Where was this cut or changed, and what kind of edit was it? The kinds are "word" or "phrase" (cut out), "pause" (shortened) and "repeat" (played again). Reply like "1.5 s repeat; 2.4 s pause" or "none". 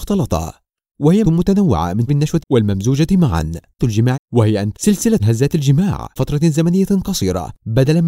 1.2 s word; 2.1 s word; 2.4 s word; 3.8 s word; 4.1 s word; 4.7 s word; 5.2 s word; 6.2 s word